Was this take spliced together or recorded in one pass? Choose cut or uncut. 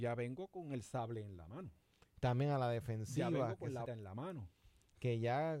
cut